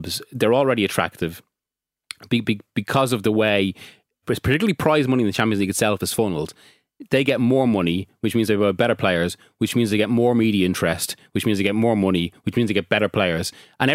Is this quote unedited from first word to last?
no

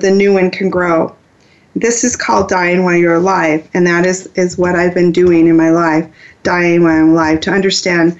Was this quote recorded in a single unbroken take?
yes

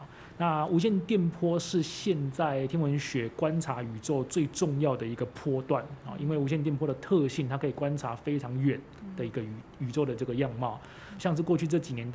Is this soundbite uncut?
no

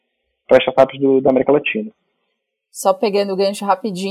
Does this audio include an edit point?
no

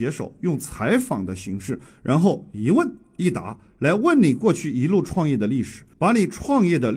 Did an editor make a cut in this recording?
yes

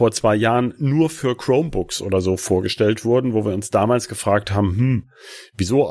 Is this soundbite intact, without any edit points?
yes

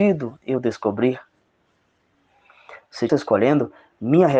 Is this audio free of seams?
no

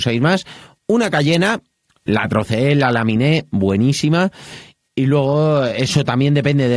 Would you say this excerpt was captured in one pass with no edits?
yes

